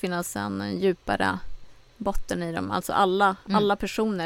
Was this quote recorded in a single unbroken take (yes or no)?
yes